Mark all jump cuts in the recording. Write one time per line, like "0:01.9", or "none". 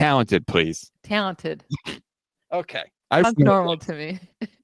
0:01.0
0:03.2